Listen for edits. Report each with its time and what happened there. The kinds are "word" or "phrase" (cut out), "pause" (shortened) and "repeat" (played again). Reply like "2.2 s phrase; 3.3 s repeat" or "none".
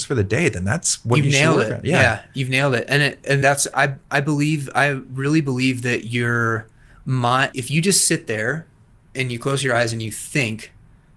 3.4 s word; 3.7 s word; 7.5 s word